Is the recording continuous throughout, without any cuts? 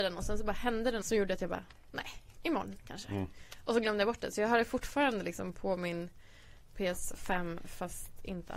no; 1 cut; at 1.0 s

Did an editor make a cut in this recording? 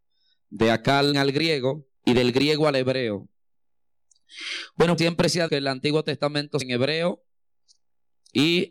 yes; 5 cuts; at 1.1 s, 1.9 s, 5.0 s, 5.5 s, 6.6 s

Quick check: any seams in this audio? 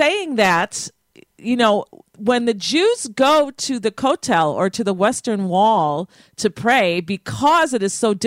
no; 0 cuts

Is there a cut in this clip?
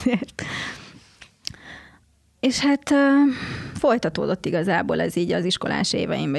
no; 0 cuts

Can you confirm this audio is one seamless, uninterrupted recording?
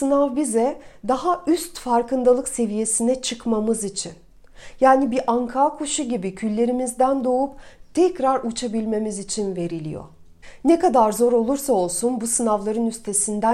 yes; 0 cuts

